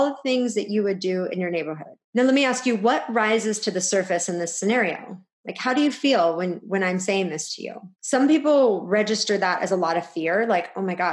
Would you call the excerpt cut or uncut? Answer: cut